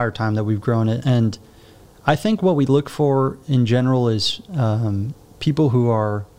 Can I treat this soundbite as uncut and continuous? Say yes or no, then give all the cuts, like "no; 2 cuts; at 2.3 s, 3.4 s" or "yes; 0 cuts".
no; 1 cut; at 1.0 s